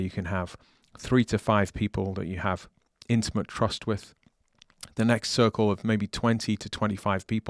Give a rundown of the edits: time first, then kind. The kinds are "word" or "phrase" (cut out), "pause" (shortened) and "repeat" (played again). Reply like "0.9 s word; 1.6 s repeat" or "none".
none